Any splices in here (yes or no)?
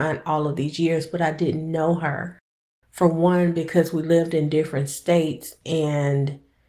no